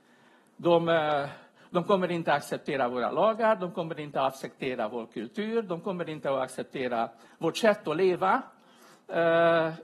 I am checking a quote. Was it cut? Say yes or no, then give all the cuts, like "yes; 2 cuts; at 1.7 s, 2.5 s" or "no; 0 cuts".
no; 0 cuts